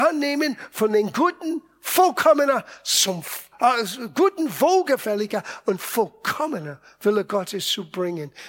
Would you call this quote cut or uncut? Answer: uncut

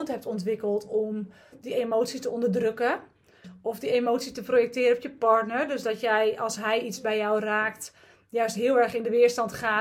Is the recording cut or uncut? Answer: uncut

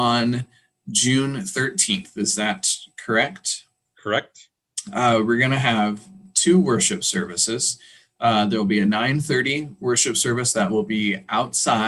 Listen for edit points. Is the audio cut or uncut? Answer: uncut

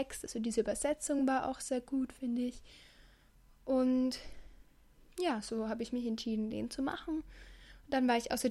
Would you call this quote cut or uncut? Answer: uncut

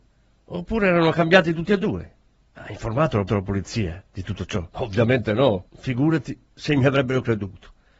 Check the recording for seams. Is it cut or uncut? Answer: cut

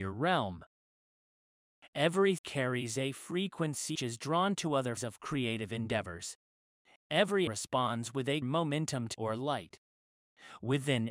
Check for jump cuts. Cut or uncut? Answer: cut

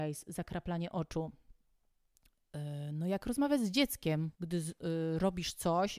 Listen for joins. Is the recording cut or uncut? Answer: cut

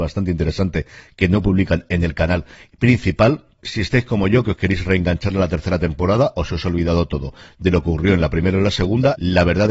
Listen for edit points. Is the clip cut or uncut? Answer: uncut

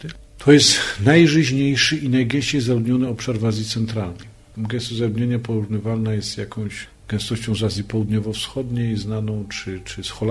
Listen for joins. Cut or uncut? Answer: uncut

